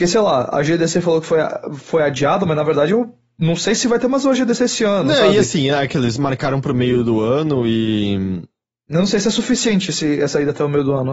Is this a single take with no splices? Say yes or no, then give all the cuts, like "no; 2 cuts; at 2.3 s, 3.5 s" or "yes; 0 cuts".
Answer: yes; 0 cuts